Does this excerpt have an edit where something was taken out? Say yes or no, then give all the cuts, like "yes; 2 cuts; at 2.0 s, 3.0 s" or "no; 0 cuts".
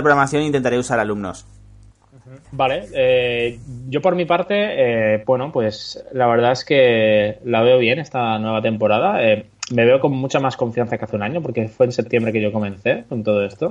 yes; 1 cut; at 2.4 s